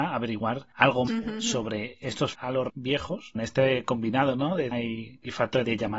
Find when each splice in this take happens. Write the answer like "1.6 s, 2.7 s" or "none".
1.1 s, 2.3 s, 2.7 s, 3.4 s, 4.7 s

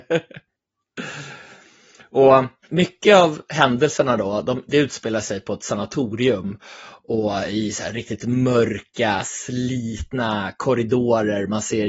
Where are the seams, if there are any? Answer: 2.6 s

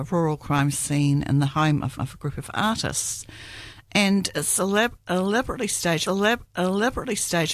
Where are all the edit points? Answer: 2.0 s, 6.1 s

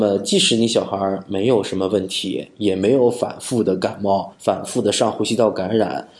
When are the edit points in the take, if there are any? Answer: 4.3 s

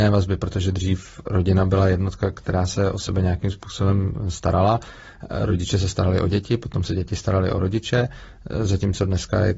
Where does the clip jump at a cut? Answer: none

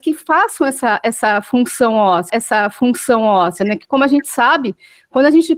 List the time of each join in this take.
2.3 s

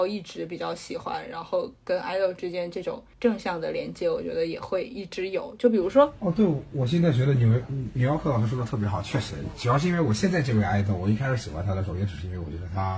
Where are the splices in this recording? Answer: 3.1 s

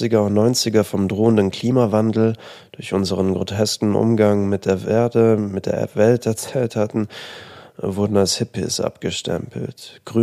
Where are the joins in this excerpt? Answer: none

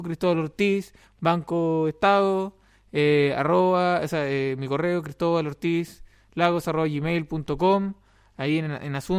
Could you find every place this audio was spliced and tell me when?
none

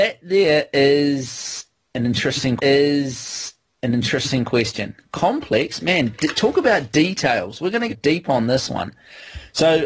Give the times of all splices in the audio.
2.6 s, 7.9 s

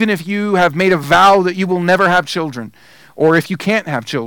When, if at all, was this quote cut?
none

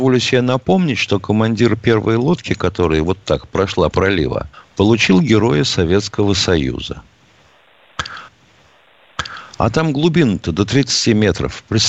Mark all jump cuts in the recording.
3.9 s, 4.5 s, 8.3 s

